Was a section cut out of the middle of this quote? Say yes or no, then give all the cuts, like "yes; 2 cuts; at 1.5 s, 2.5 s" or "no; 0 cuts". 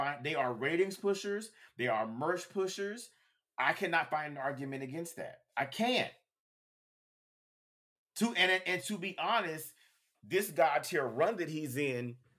no; 0 cuts